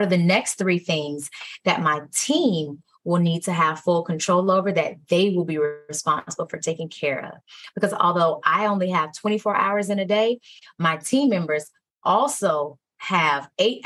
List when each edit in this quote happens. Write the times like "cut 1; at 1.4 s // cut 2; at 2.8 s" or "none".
none